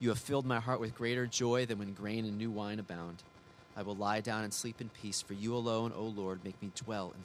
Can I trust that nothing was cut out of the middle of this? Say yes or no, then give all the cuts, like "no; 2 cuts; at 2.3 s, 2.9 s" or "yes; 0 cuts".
yes; 0 cuts